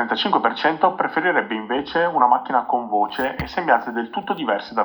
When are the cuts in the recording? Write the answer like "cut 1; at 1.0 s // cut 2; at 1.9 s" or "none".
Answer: none